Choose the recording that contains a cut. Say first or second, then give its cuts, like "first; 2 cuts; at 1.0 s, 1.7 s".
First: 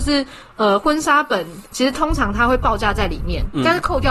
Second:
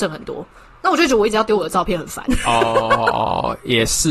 first; 1 cut; at 1.7 s